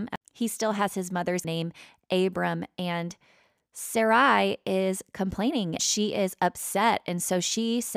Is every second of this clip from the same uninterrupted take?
no; 2 cuts; at 1.4 s, 5.8 s

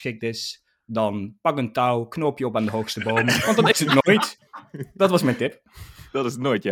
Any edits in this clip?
no; 0 cuts

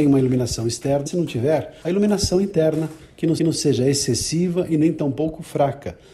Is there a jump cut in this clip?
yes; 3 cuts; at 1.1 s, 1.8 s, 3.4 s

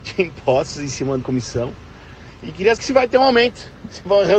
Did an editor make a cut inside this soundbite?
yes; 2 cuts; at 1.2 s, 2.8 s

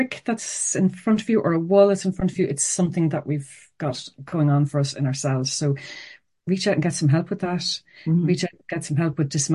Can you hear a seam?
no; 0 cuts

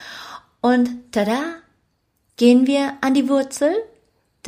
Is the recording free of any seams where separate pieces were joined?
yes; 0 cuts

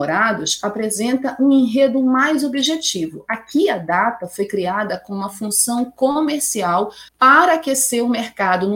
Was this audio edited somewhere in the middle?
yes; 1 cut; at 7.1 s

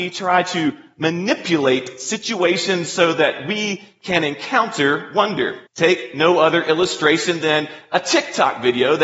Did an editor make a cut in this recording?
yes; 1 cut; at 5.7 s

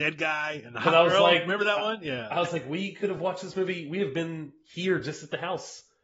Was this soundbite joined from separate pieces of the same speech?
no; 0 cuts

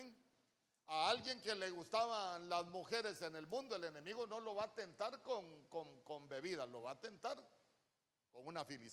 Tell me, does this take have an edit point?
no; 0 cuts

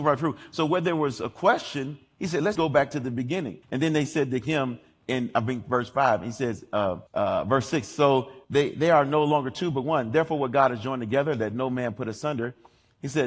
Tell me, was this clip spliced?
yes; 4 cuts; at 2.5 s, 3.6 s, 7.1 s, 8.4 s

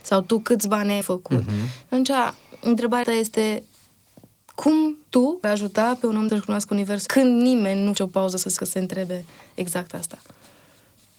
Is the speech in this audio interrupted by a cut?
yes; 8 cuts; at 1.0 s, 3.0 s, 5.1 s, 5.4 s, 6.3 s, 7.1 s, 8.0 s, 8.6 s

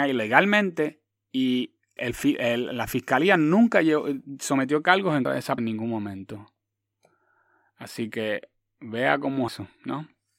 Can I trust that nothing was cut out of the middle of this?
no; 4 cuts; at 2.0 s, 5.2 s, 5.6 s, 9.5 s

